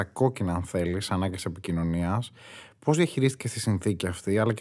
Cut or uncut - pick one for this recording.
uncut